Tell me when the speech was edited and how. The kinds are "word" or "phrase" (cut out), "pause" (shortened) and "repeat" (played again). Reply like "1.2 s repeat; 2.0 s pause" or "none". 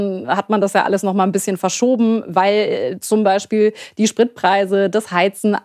none